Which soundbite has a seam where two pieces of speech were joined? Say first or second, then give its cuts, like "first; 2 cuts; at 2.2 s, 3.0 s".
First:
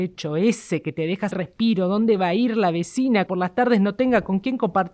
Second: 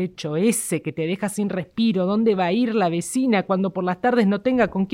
first; 2 cuts; at 1.3 s, 3.3 s